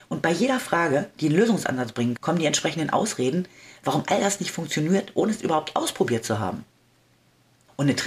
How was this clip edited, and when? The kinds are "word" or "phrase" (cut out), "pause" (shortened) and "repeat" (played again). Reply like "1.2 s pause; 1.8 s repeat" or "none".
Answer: 2.2 s word